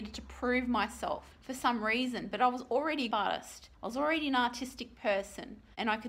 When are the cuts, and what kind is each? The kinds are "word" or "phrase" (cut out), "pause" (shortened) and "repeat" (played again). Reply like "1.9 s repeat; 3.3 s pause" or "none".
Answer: 1.3 s pause; 3.1 s phrase; 3.7 s pause